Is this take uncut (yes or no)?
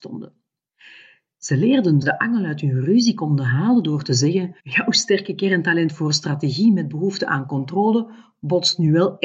no